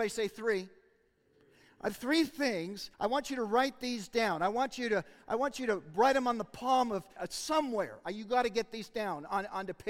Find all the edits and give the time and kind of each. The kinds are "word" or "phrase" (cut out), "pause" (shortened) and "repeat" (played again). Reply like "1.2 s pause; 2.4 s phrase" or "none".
2.9 s pause; 7.2 s phrase